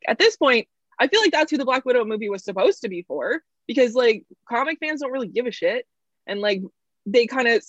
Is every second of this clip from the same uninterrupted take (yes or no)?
yes